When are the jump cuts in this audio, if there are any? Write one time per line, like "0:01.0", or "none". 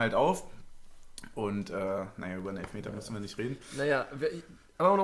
none